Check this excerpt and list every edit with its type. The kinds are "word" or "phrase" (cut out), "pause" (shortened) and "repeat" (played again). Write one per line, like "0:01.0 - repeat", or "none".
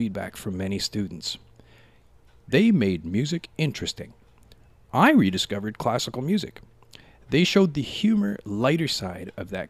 none